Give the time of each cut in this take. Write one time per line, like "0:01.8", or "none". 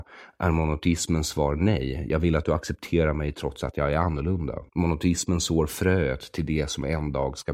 0:04.7